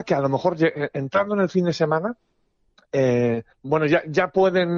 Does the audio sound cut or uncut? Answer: cut